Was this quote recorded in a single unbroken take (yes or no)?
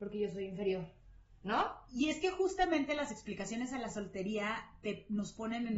yes